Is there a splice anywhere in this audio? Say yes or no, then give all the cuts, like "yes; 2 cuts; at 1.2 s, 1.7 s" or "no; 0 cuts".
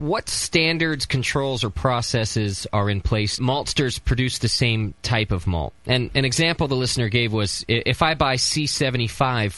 yes; 2 cuts; at 3.4 s, 5.8 s